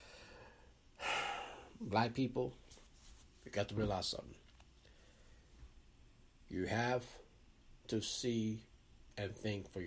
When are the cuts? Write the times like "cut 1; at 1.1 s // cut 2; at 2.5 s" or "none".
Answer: cut 1; at 7.8 s